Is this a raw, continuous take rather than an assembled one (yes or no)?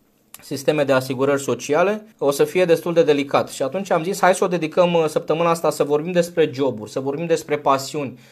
no